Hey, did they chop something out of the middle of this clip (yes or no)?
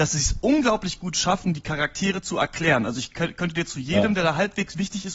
no